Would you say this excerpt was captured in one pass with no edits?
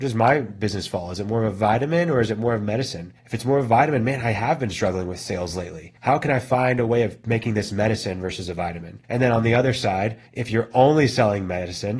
no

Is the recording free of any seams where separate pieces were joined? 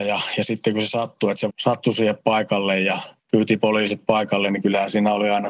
no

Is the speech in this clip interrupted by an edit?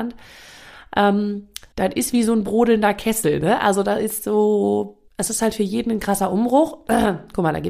yes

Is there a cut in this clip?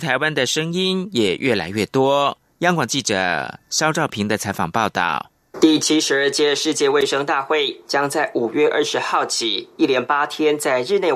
no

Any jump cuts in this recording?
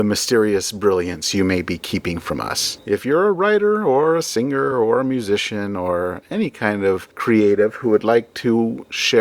no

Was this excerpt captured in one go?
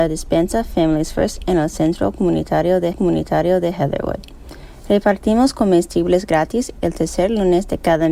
no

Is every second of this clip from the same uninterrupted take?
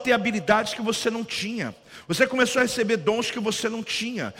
yes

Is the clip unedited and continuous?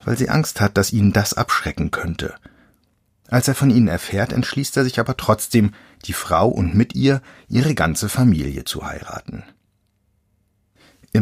yes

